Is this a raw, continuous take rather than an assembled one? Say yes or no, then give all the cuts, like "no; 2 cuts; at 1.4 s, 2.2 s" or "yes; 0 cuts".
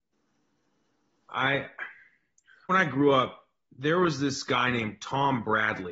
no; 1 cut; at 2.7 s